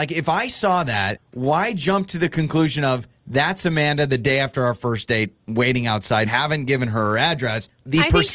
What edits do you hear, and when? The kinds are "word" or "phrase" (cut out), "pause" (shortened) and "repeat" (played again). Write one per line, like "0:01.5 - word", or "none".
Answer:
0:06.3 - phrase